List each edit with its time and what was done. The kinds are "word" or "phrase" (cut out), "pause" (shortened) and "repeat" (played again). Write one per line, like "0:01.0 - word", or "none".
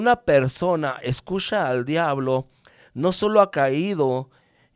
none